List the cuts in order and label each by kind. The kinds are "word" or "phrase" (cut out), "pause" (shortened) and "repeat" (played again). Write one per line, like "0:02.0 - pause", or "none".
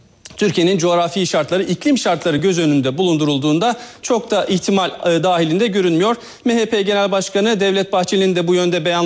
none